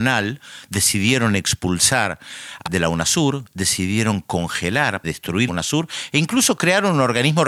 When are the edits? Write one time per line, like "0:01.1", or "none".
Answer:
0:02.7
0:05.0
0:05.5